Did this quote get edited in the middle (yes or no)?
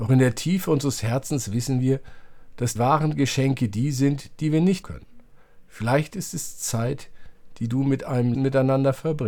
yes